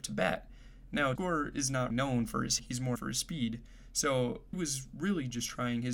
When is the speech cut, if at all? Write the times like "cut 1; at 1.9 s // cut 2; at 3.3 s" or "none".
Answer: cut 1; at 1.2 s // cut 2; at 1.9 s // cut 3; at 2.6 s // cut 4; at 3.0 s // cut 5; at 4.5 s